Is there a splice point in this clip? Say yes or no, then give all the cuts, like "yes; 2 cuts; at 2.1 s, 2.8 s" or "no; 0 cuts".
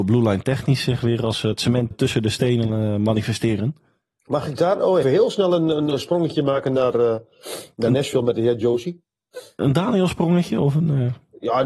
yes; 3 cuts; at 1.9 s, 4.0 s, 5.0 s